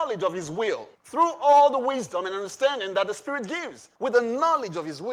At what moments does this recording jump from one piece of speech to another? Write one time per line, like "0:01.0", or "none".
0:00.9
0:04.0